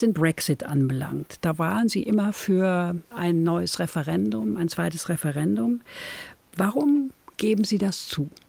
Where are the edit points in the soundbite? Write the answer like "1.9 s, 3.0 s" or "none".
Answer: 3.0 s